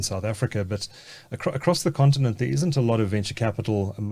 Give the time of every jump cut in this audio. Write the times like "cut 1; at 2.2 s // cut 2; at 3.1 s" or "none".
none